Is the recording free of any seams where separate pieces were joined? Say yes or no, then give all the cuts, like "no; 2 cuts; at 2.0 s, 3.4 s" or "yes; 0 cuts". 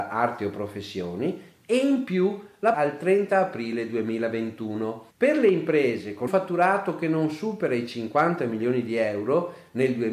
no; 3 cuts; at 2.7 s, 5.1 s, 6.3 s